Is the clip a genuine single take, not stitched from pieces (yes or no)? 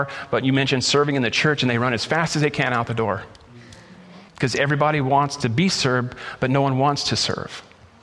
no